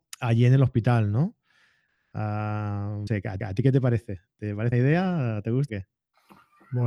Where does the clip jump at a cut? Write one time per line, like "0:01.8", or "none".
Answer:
0:03.1
0:03.4
0:04.7
0:05.7